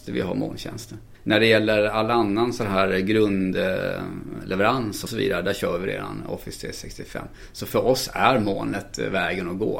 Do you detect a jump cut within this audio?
yes; 1 cut; at 5.1 s

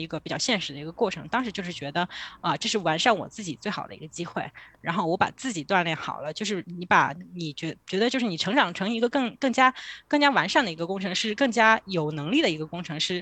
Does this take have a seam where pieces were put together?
yes; 1 cut; at 7.8 s

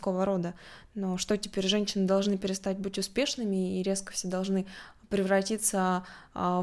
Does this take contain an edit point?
no; 0 cuts

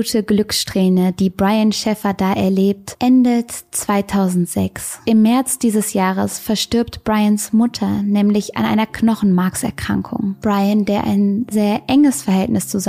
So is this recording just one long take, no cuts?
no; 1 cut; at 11.5 s

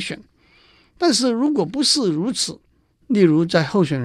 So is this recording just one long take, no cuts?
yes; 0 cuts

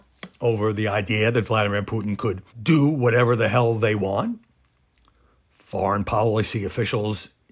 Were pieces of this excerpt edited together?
yes; 1 cut; at 2.5 s

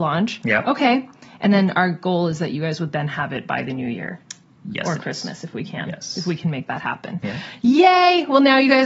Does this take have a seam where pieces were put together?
no; 0 cuts

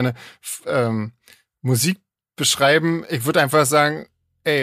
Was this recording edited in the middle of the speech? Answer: no; 0 cuts

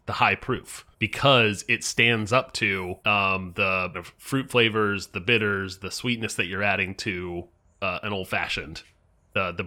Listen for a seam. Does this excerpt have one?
yes; 4 cuts; at 0.9 s, 3.0 s, 3.9 s, 5.8 s

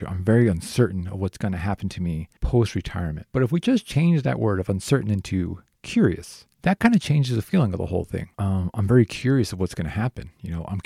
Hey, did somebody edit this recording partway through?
yes; 4 cuts; at 2.4 s, 3.3 s, 6.5 s, 8.3 s

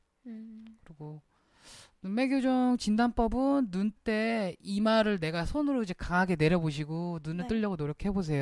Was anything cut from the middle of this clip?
yes; 1 cut; at 4.0 s

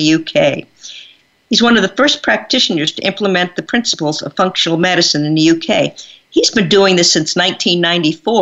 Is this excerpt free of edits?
yes; 0 cuts

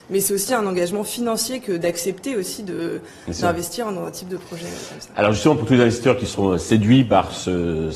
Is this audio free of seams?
yes; 0 cuts

